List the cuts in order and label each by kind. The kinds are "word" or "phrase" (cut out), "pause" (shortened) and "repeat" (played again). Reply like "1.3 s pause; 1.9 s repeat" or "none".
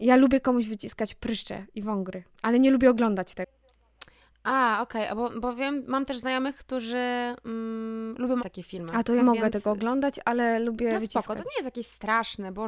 8.4 s word; 9.2 s word